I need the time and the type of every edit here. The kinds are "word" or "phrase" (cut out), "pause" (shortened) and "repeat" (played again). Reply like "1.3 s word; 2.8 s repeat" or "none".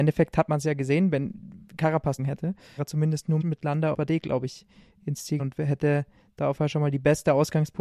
2.2 s word; 2.8 s word; 3.4 s word; 3.9 s word; 5.4 s word; 6.6 s word